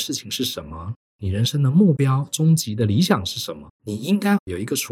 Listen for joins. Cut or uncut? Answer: cut